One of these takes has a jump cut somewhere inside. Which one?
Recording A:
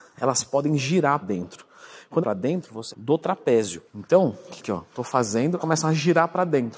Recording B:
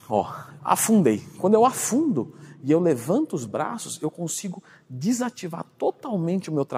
A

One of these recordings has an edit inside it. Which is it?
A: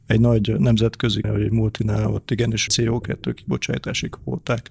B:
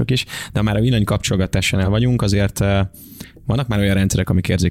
A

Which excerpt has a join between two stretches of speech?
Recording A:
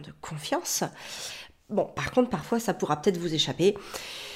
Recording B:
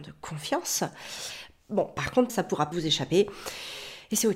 B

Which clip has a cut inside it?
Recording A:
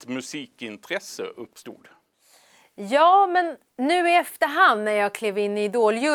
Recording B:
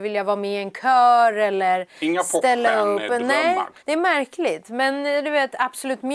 B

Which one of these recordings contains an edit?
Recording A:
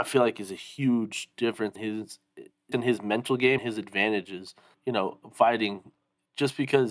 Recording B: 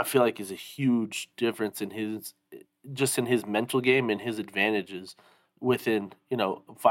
A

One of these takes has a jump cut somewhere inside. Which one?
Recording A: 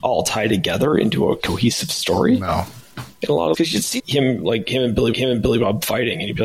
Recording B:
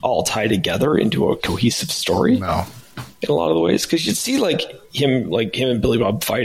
A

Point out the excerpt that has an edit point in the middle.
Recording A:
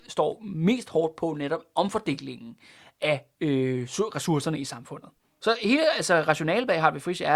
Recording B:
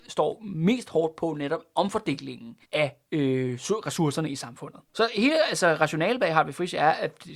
B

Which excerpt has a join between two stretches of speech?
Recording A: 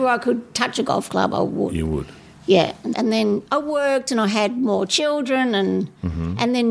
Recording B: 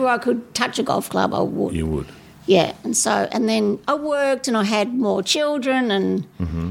A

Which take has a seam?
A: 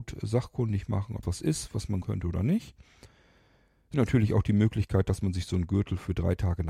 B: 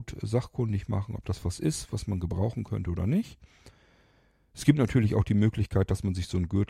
A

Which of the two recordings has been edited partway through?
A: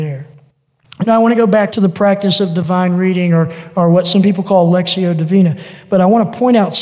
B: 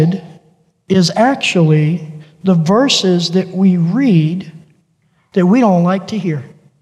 A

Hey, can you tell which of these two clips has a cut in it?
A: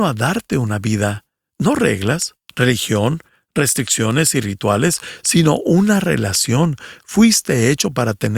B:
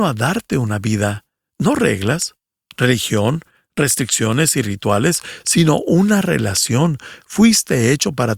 A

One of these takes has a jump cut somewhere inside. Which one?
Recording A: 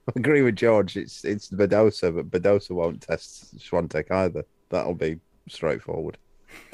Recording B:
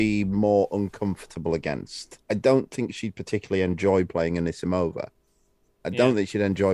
B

